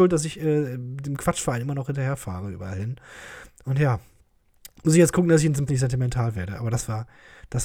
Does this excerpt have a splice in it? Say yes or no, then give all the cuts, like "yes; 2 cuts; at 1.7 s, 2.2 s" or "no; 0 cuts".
yes; 1 cut; at 5.7 s